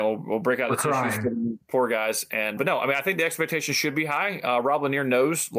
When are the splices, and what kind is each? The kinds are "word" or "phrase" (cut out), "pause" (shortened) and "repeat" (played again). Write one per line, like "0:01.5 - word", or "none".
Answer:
0:01.6 - pause
0:02.6 - word